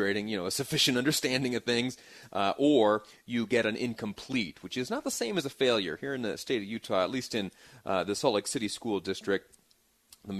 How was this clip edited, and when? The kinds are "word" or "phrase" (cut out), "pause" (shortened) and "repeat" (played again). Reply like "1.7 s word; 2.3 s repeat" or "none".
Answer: none